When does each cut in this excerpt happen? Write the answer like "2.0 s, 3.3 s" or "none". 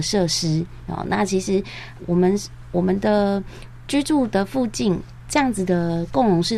2.0 s